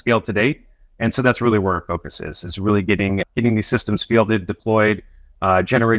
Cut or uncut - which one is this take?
cut